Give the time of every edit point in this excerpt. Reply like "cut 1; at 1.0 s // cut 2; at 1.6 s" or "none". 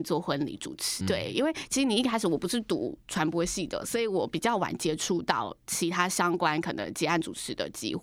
cut 1; at 1.0 s